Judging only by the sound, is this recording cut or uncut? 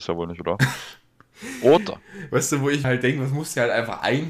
cut